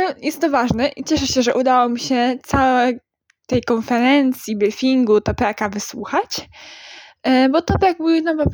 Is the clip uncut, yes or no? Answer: yes